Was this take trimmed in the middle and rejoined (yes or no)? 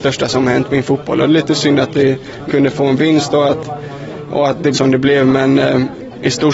yes